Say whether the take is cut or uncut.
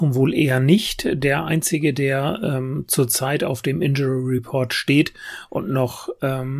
uncut